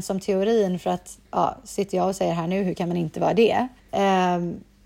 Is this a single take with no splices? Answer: no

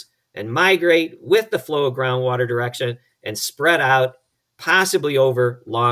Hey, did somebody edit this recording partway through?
no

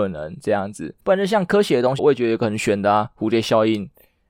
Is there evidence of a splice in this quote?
yes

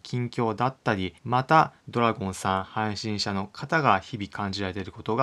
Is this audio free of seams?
no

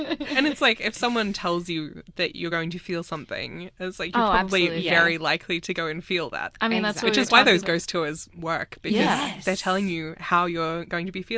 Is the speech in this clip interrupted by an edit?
no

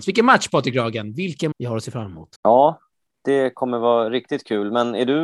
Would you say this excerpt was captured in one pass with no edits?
no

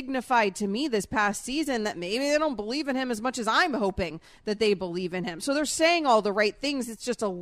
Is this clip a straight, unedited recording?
yes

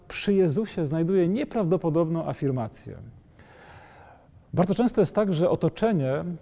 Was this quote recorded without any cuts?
yes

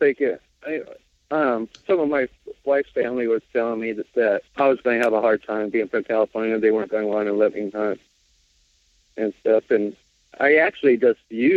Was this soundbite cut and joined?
yes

